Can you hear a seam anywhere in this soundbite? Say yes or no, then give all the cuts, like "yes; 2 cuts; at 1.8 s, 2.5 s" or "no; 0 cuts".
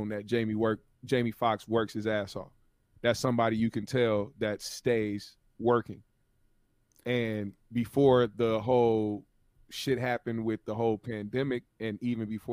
no; 0 cuts